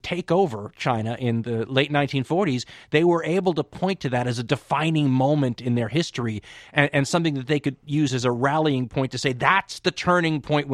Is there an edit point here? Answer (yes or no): no